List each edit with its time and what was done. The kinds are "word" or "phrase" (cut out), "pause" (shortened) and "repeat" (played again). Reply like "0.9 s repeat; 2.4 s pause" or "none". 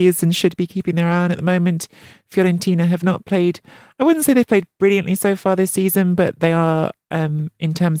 none